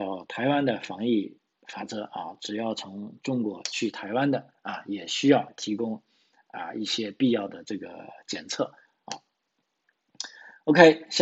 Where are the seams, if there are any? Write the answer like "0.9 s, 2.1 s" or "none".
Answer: none